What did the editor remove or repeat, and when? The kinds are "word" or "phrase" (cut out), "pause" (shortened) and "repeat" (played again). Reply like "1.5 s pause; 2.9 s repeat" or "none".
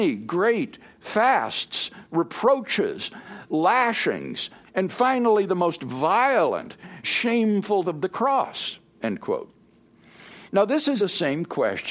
4.7 s word; 7.0 s word; 7.8 s word; 10.5 s pause; 11.0 s word